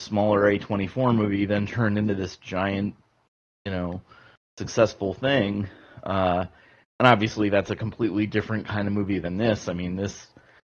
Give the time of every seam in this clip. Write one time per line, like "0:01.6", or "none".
none